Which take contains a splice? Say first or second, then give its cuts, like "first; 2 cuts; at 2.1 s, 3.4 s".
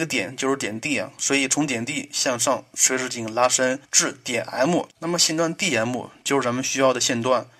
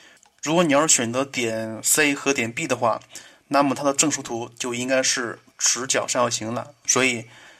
first; 2 cuts; at 3.8 s, 4.9 s